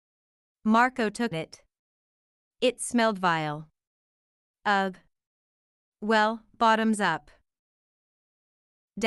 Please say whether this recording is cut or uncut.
cut